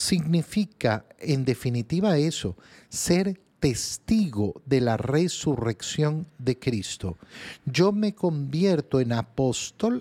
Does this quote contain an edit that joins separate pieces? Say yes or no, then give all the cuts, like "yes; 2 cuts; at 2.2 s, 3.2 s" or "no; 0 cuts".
no; 0 cuts